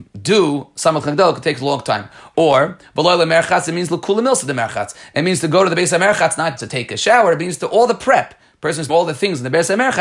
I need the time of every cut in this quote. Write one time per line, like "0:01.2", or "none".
0:01.0
0:06.6
0:08.9